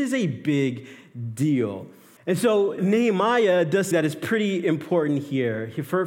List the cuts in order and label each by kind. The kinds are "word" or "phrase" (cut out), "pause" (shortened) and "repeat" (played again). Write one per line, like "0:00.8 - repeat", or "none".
0:02.2 - pause
0:02.8 - word
0:03.9 - word

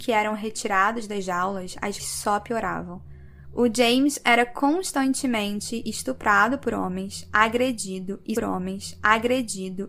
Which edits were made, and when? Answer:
0:02.0 - word
0:08.4 - repeat

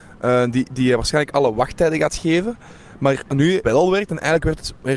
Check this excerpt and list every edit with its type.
0:03.6 - word

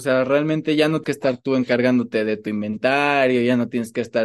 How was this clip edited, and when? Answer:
0:01.0 - word

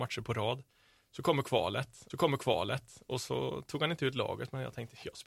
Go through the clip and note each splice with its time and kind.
0:02.1 - repeat

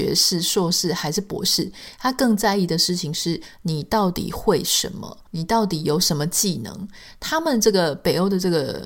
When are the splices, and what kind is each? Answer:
0:05.3 - pause

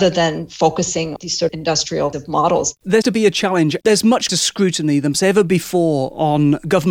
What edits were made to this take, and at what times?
0:01.2 - word
0:01.5 - word
0:02.1 - word
0:03.0 - word
0:04.3 - word
0:05.1 - word

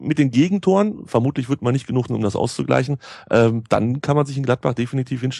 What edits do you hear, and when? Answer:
0:02.1 - phrase

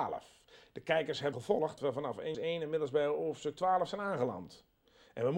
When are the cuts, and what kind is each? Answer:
0:01.3 - word
0:01.8 - word
0:02.3 - word

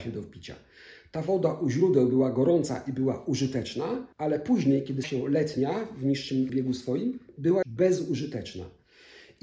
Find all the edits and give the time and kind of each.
0:04.1 - pause
0:05.0 - word
0:06.5 - word
0:07.6 - word

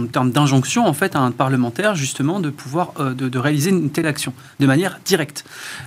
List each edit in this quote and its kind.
0:04.0 - phrase

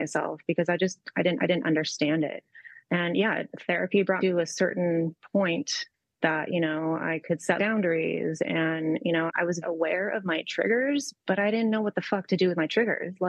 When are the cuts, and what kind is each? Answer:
0:01.4 - repeat
0:02.8 - pause
0:04.2 - word
0:05.9 - pause
0:07.6 - word
0:09.3 - word
0:09.6 - word

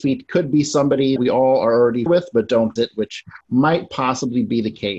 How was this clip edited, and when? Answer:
0:01.2 - word
0:02.1 - word
0:02.8 - word
0:03.4 - pause

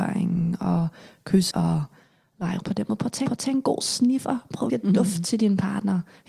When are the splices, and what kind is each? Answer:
0:01.5 - word
0:02.6 - word
0:03.3 - repeat
0:04.7 - word

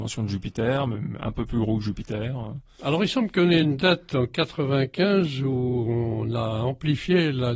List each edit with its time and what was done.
none

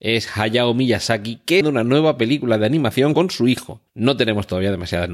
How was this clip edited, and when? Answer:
0:01.6 - phrase
0:03.1 - word
0:03.9 - pause

